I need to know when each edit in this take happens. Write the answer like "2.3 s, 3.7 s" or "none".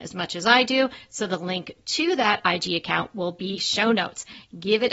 3.6 s